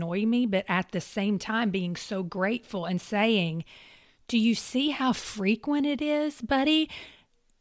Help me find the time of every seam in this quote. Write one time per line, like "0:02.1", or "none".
none